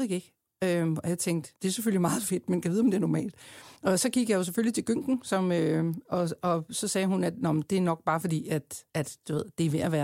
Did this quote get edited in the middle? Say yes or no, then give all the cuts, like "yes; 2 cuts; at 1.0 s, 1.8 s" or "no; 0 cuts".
yes; 3 cuts; at 1.6 s, 3.8 s, 8.9 s